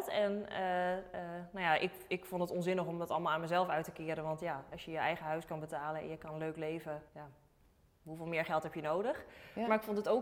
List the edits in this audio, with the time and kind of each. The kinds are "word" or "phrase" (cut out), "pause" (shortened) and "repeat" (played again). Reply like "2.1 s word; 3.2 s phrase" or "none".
7.1 s pause